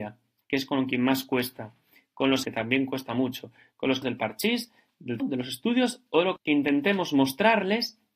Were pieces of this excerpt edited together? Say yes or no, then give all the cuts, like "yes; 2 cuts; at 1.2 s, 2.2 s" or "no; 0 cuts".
yes; 4 cuts; at 2.4 s, 4.0 s, 5.2 s, 6.4 s